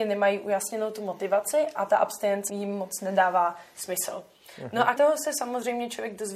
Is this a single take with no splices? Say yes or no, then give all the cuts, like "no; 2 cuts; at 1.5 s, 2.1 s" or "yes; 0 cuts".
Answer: no; 2 cuts; at 2.5 s, 5.0 s